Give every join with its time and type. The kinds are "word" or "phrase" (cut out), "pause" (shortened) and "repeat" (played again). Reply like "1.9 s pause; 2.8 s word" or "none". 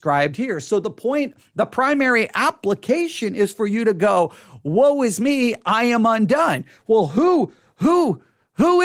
none